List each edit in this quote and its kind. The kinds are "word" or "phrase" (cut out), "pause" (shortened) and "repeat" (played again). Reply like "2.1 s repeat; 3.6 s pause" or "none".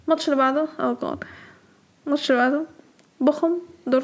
none

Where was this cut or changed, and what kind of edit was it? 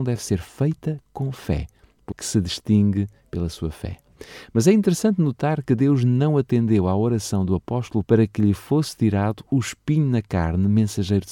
2.1 s word; 8.0 s word

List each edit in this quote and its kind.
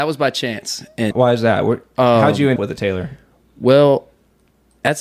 1.1 s word; 2.6 s word

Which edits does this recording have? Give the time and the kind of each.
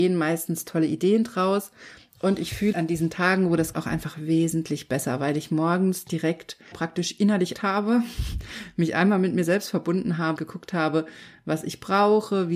2.7 s word; 3.7 s word; 6.7 s word; 7.5 s word; 10.4 s word

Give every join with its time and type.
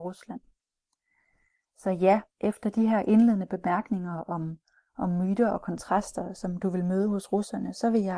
2.3 s pause

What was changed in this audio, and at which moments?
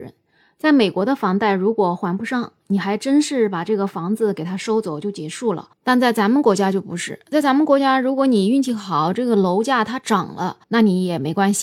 5.7 s pause; 10.6 s pause

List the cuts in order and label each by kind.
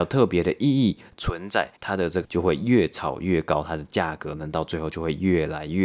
1.7 s pause; 2.2 s word

